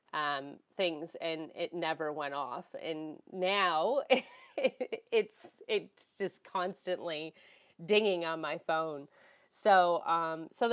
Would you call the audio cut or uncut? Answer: uncut